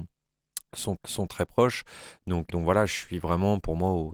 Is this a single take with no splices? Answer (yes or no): no